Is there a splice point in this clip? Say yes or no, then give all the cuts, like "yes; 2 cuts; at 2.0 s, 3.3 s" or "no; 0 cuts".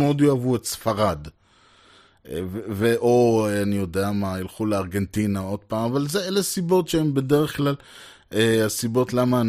no; 0 cuts